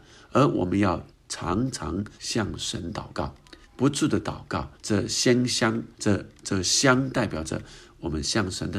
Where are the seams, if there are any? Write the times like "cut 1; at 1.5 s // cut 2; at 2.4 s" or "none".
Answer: cut 1; at 1.1 s // cut 2; at 2.2 s // cut 3; at 3.6 s // cut 4; at 4.7 s // cut 5; at 5.9 s